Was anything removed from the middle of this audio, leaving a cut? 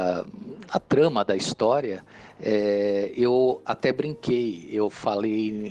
no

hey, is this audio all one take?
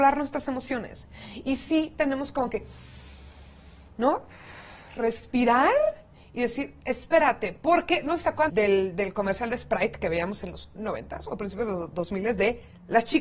no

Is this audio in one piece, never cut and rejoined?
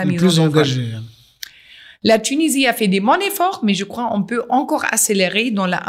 yes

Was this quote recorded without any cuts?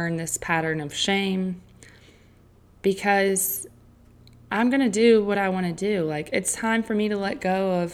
yes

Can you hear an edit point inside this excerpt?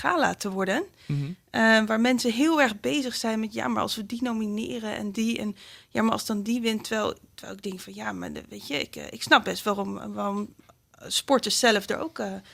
no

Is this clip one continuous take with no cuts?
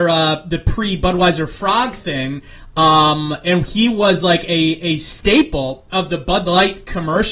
yes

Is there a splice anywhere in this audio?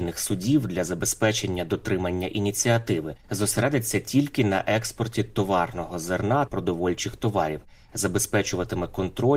yes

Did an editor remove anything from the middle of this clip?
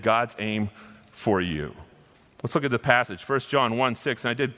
no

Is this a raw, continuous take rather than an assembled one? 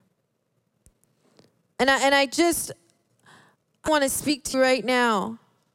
no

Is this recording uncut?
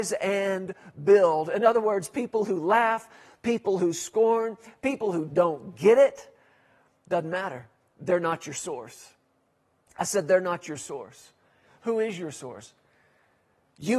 no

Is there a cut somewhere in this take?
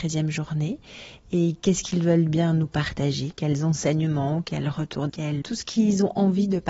yes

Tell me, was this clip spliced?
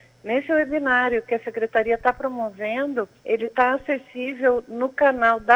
yes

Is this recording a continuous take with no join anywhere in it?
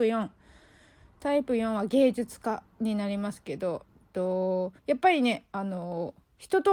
no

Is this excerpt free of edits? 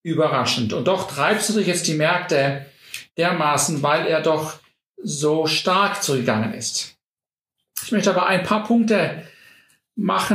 yes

